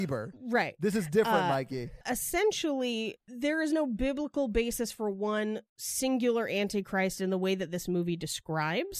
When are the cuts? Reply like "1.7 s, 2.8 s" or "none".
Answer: 5.7 s